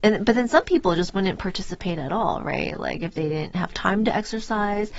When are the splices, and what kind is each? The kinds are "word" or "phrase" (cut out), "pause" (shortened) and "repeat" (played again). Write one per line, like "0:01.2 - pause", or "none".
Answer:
none